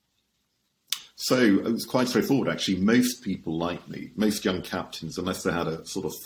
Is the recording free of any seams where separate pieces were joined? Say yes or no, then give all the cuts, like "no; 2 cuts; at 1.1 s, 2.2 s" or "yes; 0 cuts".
yes; 0 cuts